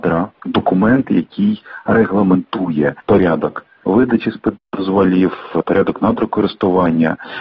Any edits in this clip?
no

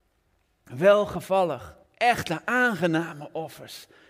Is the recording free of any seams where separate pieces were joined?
no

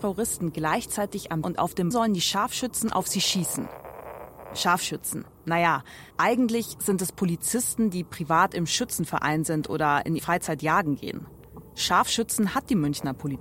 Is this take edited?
yes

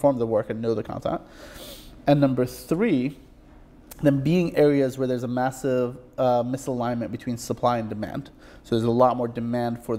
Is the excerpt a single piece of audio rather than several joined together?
yes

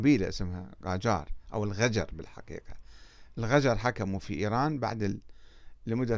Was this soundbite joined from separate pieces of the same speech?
no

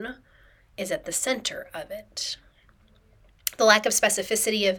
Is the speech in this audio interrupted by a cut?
no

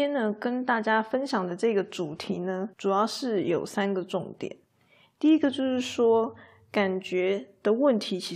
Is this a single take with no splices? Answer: no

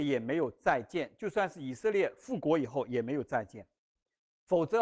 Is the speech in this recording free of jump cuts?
yes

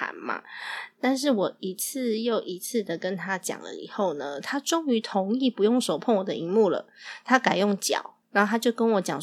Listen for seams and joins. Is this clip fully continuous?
no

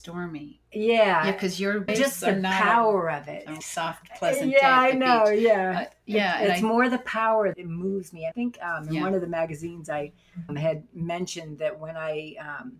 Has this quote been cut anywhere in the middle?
yes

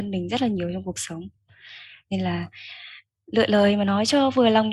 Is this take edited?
no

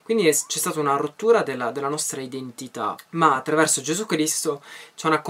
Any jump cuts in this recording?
no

